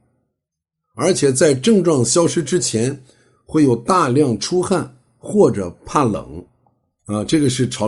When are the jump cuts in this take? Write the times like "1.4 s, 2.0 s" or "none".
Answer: none